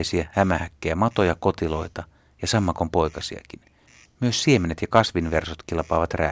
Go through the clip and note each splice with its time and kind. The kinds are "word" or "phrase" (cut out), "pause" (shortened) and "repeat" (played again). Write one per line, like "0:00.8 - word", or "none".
none